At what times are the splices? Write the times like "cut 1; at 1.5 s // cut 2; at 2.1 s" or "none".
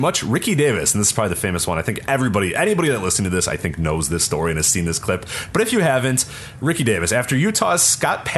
none